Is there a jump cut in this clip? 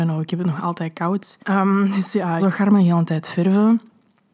yes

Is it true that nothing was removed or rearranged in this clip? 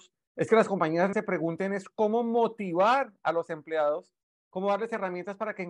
no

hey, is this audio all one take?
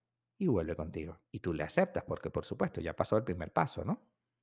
no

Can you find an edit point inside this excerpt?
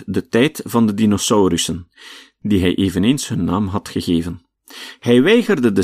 no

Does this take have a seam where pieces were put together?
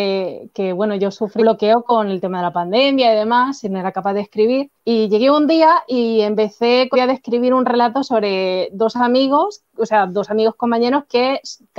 yes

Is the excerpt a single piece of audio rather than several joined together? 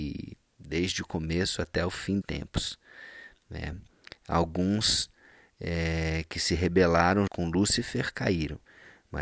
no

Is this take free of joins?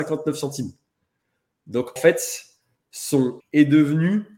no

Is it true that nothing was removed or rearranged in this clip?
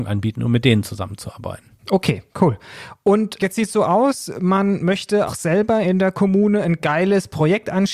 no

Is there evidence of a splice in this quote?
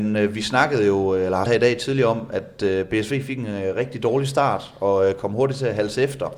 yes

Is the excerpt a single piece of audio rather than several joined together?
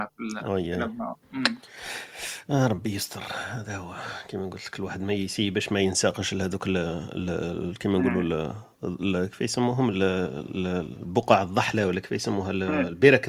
no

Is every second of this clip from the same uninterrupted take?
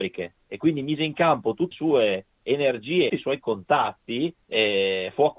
no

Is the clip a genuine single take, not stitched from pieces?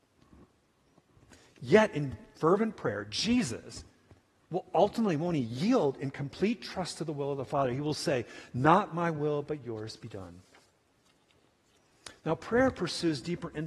yes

